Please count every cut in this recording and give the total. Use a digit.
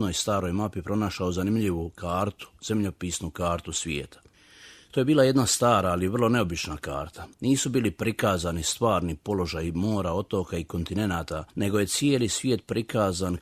2